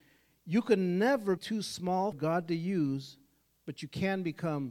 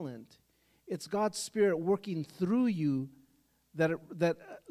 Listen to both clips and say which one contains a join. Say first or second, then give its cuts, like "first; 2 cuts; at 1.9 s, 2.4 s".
first; 2 cuts; at 1.4 s, 2.1 s